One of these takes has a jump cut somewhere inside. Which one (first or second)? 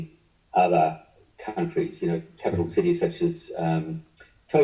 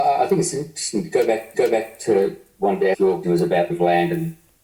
second